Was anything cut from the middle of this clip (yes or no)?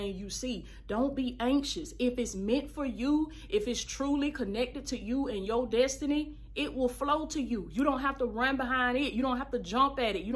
no